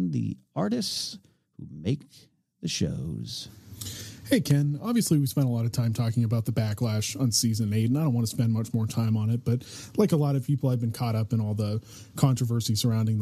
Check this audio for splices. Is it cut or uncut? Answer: uncut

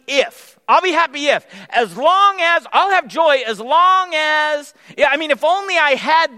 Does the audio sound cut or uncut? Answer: uncut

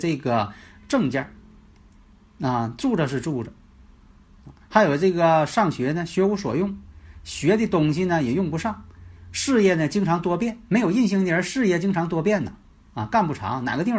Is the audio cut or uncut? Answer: uncut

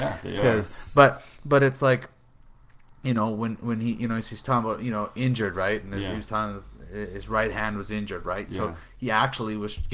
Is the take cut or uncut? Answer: uncut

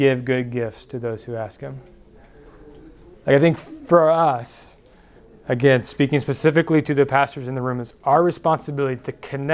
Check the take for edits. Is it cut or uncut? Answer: uncut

